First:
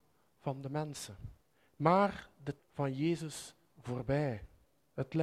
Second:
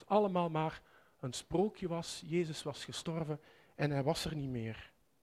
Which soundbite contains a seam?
first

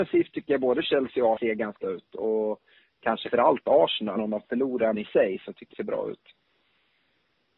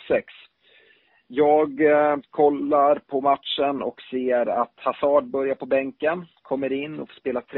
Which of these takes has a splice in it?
first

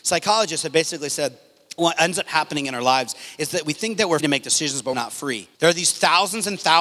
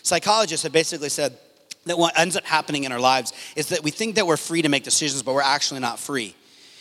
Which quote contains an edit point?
first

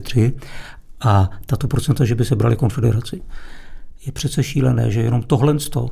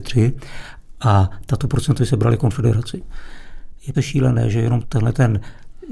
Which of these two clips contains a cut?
second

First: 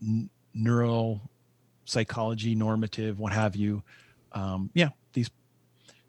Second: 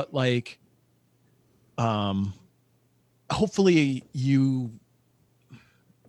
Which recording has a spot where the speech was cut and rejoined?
second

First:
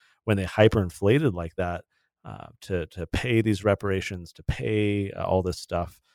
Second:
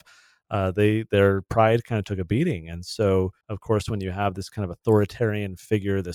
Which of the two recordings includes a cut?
second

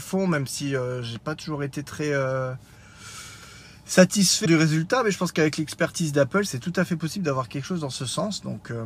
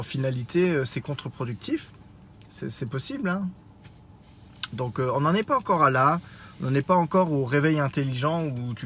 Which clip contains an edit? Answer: first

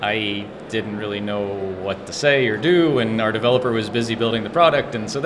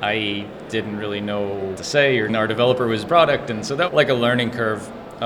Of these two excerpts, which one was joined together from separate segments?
second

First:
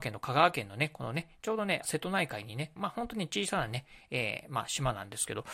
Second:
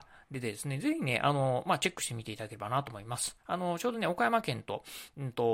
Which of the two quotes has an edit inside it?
first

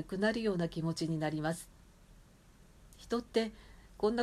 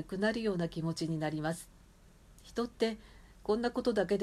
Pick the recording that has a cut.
second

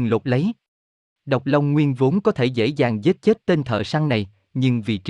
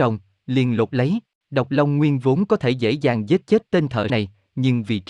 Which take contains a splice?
second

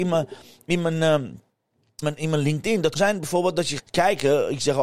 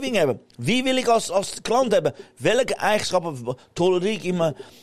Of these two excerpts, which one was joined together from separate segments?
first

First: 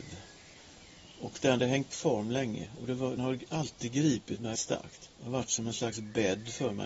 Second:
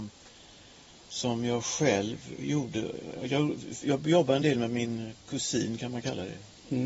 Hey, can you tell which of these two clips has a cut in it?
first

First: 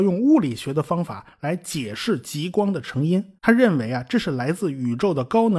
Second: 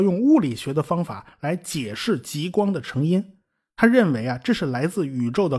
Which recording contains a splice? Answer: first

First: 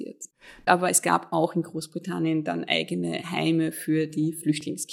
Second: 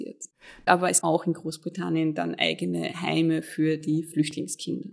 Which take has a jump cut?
second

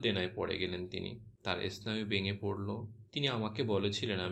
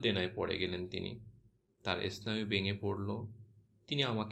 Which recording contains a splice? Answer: first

